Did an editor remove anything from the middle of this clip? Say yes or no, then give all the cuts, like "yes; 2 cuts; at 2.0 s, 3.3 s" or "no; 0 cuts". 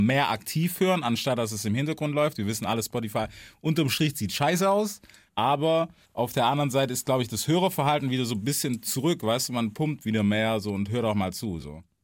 no; 0 cuts